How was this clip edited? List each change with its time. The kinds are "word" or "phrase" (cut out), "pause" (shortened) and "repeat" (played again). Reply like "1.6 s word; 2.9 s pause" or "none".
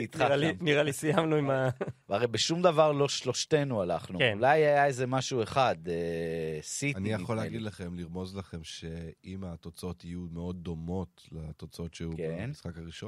none